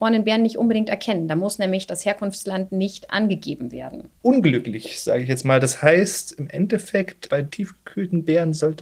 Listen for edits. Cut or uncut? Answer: cut